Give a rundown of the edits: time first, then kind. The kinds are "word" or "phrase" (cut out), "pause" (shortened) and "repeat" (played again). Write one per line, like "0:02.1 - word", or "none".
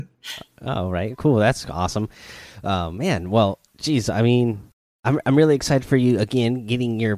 0:03.7 - pause
0:04.7 - pause